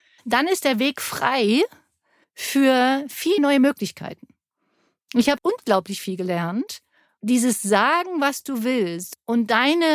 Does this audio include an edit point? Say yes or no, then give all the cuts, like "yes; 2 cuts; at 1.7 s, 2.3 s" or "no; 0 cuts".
yes; 2 cuts; at 3.4 s, 5.4 s